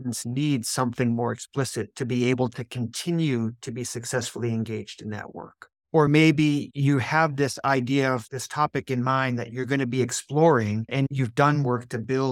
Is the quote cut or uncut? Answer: uncut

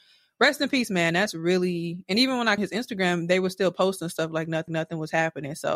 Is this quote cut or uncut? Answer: cut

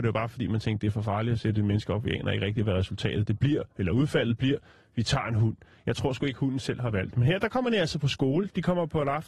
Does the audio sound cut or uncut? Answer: uncut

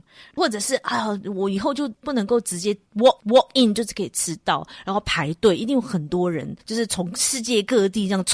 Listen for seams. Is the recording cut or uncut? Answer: cut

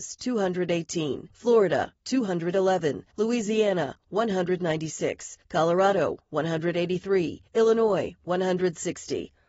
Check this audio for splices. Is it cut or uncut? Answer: cut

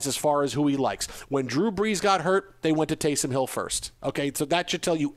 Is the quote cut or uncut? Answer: uncut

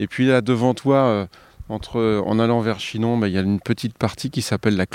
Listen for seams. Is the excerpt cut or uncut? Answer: uncut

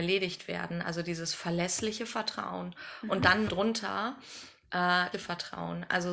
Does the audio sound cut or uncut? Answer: cut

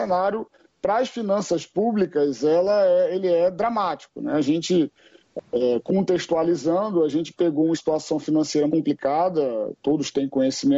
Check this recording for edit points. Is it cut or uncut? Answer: cut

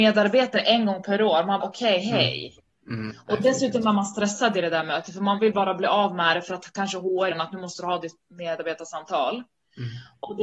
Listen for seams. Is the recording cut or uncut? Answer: cut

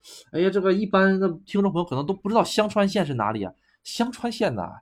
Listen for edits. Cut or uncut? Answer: uncut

